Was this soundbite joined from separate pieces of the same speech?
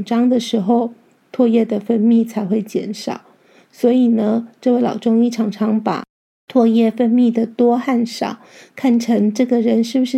no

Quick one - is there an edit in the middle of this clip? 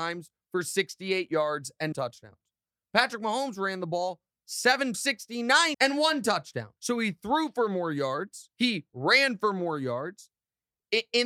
yes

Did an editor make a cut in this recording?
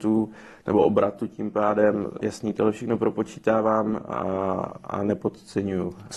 no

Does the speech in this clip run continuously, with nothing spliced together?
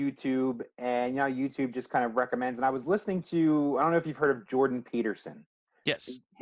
yes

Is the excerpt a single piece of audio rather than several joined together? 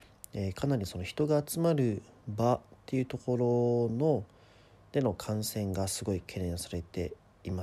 yes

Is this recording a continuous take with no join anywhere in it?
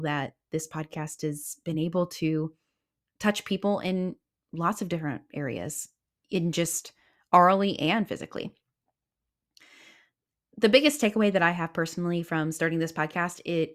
yes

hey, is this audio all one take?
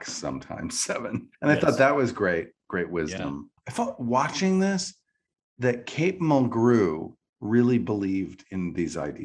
no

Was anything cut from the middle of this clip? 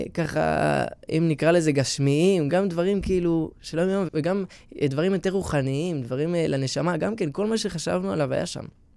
yes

